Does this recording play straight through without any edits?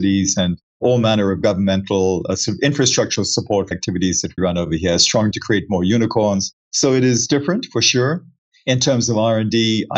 no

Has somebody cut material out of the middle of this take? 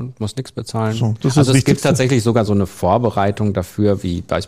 no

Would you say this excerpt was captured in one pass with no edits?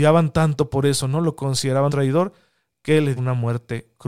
no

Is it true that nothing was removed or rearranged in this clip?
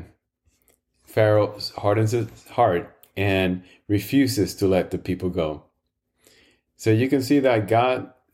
yes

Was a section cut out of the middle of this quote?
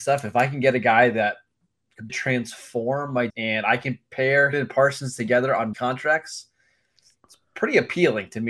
yes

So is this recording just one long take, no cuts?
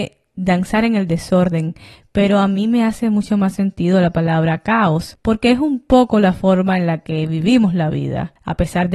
yes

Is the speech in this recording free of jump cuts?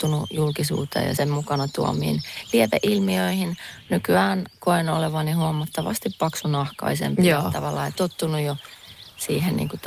no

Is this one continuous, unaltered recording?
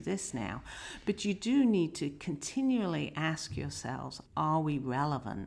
no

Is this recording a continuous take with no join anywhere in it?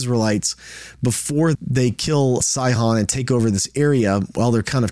no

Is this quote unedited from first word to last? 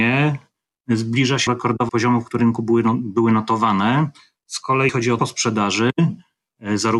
no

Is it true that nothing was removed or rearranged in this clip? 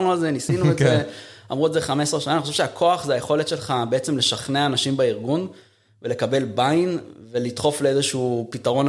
yes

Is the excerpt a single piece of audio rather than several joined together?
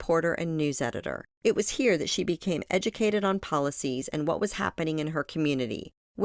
yes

